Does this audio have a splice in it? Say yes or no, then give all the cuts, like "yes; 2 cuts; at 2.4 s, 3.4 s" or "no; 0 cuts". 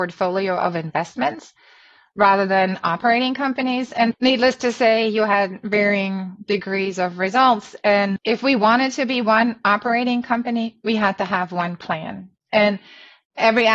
no; 0 cuts